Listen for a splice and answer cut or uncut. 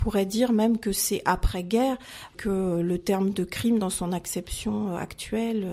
uncut